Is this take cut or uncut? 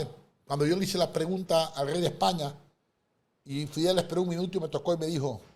uncut